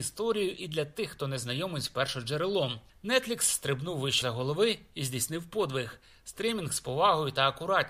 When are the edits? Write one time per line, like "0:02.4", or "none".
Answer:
none